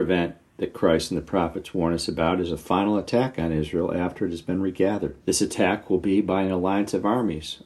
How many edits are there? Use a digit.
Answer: 1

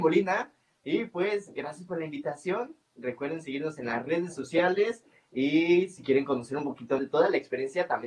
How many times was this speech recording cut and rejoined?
1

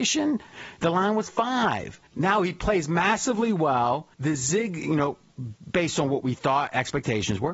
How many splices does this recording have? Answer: 2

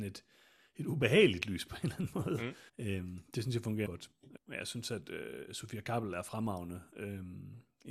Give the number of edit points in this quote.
3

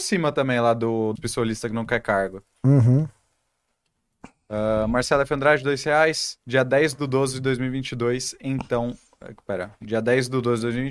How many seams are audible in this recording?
2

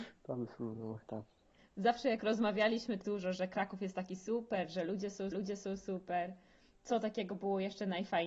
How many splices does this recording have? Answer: 3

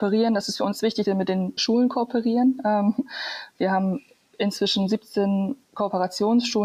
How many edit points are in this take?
2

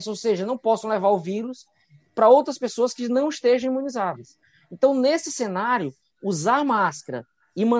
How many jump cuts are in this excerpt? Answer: 0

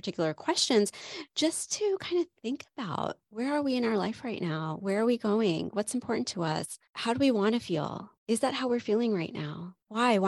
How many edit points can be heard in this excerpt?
0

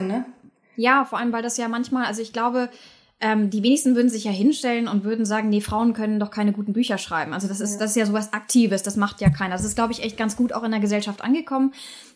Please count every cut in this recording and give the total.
0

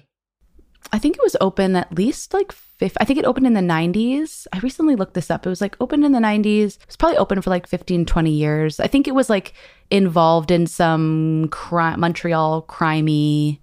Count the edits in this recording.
1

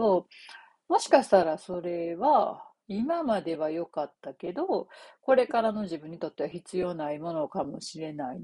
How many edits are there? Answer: 1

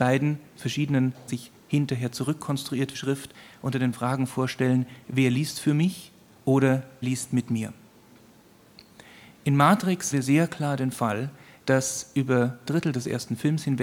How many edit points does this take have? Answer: 6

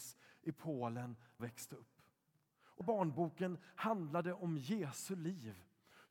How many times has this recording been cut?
2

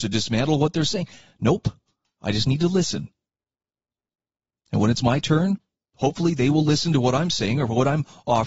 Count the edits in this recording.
1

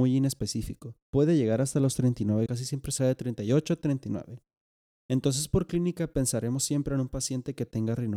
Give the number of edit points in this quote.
3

